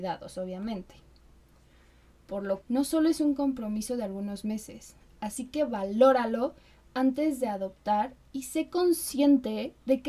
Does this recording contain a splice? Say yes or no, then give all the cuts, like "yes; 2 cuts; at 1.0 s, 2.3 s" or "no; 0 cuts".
yes; 1 cut; at 2.6 s